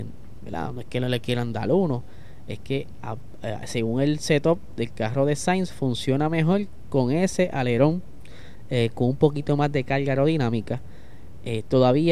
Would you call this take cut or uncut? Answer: uncut